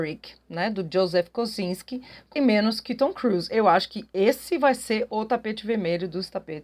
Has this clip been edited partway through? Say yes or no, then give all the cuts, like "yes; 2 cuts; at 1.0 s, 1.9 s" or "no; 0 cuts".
yes; 1 cut; at 2.4 s